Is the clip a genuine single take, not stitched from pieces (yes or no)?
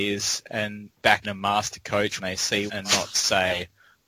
no